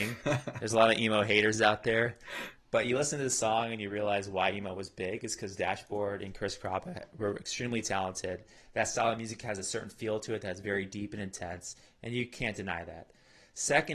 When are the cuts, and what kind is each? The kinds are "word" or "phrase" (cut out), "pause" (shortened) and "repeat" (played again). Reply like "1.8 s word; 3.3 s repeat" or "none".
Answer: none